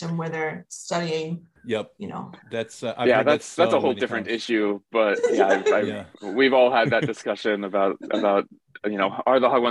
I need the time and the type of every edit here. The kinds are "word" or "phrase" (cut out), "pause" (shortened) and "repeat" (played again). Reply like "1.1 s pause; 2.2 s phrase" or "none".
1.6 s pause; 2.4 s pause; 6.1 s pause